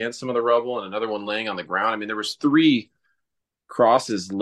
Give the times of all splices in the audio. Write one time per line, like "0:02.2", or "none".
none